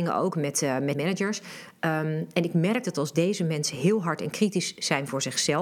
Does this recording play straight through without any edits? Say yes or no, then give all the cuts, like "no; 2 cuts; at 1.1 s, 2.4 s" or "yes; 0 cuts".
no; 2 cuts; at 0.9 s, 2.8 s